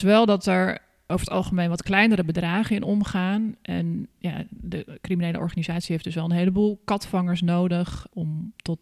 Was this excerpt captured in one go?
yes; 0 cuts

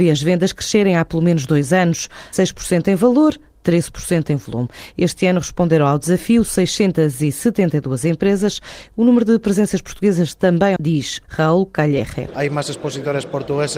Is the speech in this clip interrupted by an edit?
yes; 2 cuts; at 2.3 s, 10.8 s

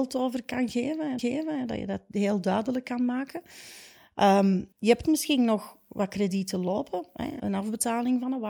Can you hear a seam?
yes; 4 cuts; at 1.2 s, 4.7 s, 5.0 s, 7.4 s

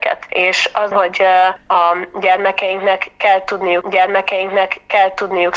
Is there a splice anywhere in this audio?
yes; 2 cuts; at 0.9 s, 3.8 s

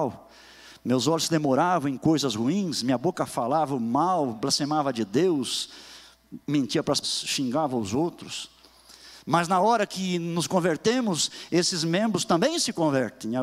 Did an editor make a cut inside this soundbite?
yes; 2 cuts; at 6.4 s, 7.0 s

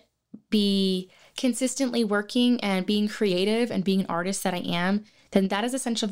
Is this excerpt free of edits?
yes; 0 cuts

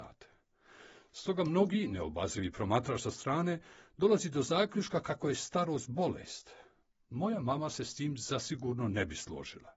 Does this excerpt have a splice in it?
no; 0 cuts

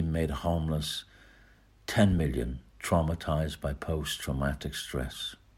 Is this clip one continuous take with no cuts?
yes; 0 cuts

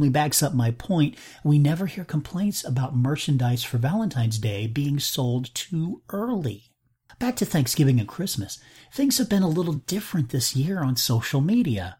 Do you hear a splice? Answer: no; 0 cuts

